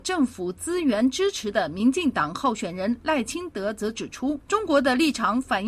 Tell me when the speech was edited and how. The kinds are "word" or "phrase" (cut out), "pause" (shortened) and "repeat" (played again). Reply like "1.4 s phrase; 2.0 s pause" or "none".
4.4 s pause